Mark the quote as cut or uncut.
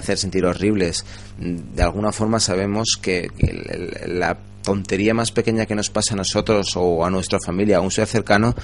uncut